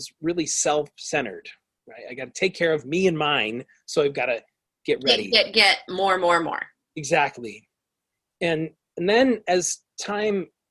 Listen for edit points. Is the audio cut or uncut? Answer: uncut